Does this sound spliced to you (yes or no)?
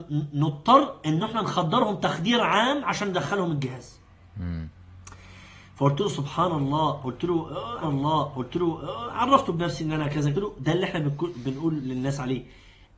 yes